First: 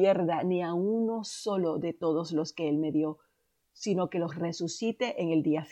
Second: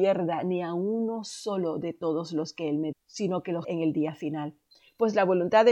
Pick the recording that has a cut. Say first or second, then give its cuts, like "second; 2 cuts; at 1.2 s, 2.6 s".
second; 2 cuts; at 2.9 s, 3.6 s